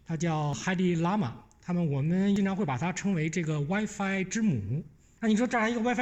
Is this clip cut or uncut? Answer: uncut